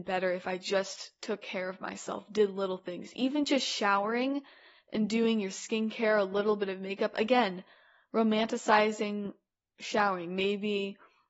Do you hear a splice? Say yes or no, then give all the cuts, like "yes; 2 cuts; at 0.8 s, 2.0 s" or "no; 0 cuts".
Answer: no; 0 cuts